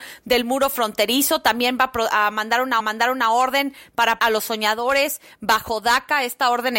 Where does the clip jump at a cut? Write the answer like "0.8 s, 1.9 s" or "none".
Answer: 2.8 s, 4.2 s